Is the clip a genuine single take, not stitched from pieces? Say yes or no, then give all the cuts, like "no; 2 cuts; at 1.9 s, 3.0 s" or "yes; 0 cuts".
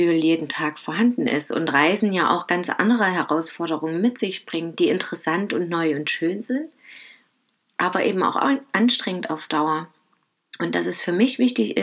yes; 0 cuts